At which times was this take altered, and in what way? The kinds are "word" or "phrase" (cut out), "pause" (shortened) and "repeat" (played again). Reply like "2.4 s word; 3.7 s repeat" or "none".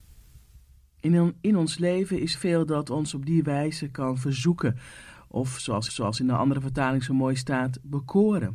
2.3 s word; 5.9 s repeat